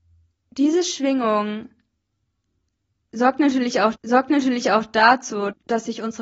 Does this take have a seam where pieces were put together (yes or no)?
yes